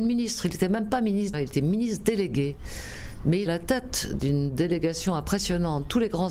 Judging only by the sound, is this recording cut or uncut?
cut